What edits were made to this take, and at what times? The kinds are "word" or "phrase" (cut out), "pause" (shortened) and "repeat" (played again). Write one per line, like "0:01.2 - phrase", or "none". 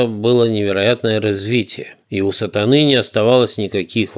0:02.0 - pause